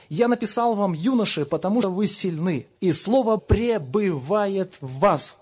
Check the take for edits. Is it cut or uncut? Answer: cut